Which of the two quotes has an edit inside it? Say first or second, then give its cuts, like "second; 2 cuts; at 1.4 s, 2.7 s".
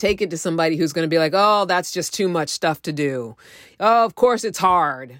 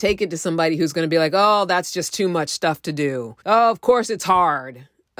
second; 1 cut; at 3.4 s